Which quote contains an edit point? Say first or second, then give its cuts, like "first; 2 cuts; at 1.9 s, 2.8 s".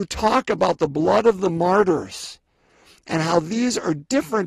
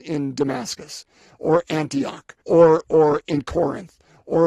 second; 1 cut; at 2.4 s